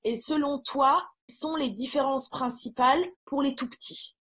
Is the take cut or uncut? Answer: cut